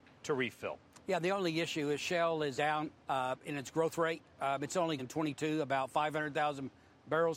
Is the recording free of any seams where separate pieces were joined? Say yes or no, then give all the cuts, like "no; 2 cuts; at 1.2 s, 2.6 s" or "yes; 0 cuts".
no; 3 cuts; at 2.6 s, 3.0 s, 5.0 s